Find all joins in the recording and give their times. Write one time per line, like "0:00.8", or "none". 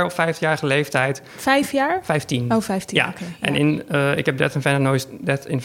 none